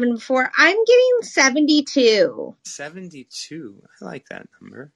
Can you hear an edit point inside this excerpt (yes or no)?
yes